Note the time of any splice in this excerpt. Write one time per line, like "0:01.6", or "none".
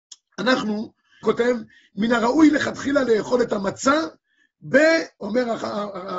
0:01.2

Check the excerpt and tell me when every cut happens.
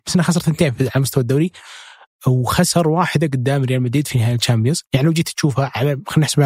none

